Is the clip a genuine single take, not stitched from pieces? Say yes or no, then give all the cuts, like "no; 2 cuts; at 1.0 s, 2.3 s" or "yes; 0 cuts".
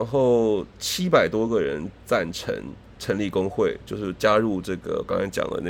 no; 1 cut; at 3.0 s